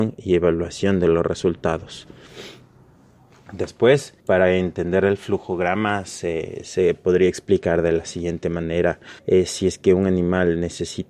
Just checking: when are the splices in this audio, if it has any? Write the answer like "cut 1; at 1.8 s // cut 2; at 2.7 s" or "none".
cut 1; at 4.2 s // cut 2; at 9.2 s